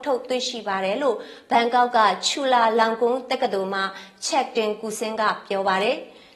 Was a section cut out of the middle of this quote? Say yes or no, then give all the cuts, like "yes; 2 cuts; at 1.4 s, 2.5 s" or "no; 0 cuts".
no; 0 cuts